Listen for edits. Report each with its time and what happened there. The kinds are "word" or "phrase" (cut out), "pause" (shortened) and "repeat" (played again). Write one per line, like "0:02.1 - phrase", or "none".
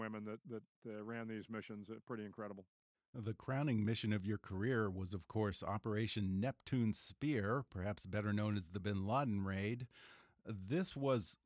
none

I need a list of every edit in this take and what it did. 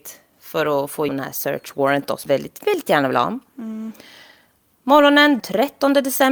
0:01.1 - word
0:02.3 - word
0:02.6 - word
0:05.4 - word

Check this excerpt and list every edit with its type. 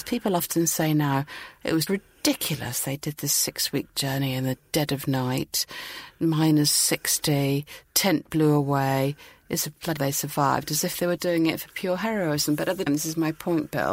0:01.9 - word
0:10.0 - word
0:11.2 - word
0:12.9 - word

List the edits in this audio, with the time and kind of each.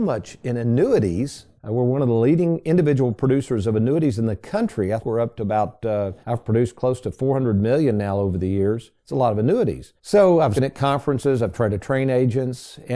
0:01.6 - pause
0:05.0 - word
0:06.2 - pause
0:10.0 - pause
0:10.6 - word

